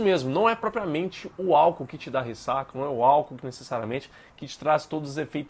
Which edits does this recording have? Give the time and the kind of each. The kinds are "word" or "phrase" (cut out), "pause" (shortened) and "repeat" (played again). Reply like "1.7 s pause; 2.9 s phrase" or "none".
none